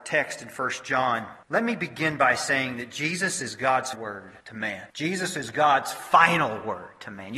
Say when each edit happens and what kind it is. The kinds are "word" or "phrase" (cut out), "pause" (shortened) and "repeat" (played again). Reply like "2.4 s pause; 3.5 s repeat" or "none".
1.4 s pause; 3.9 s word; 4.4 s pause; 4.9 s pause